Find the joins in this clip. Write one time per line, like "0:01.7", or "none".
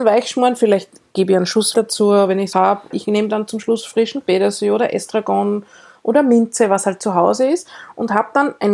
0:01.7
0:02.5
0:02.9